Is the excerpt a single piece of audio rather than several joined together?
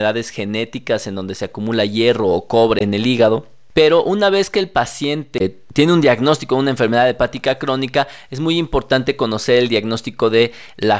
yes; 0 cuts

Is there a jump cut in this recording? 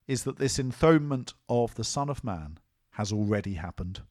no; 0 cuts

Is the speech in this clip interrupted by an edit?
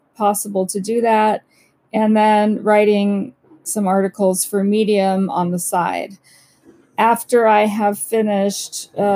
no; 0 cuts

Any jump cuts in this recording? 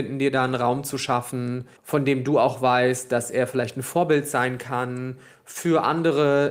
yes; 1 cut; at 1.8 s

